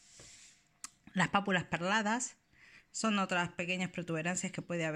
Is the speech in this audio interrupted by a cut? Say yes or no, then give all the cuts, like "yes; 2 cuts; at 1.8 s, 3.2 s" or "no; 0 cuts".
no; 0 cuts